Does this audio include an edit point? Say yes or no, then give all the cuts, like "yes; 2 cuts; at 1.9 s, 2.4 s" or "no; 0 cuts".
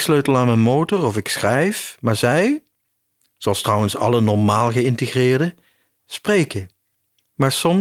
no; 0 cuts